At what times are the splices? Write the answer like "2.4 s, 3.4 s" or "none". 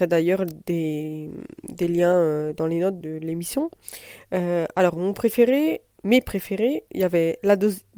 3.0 s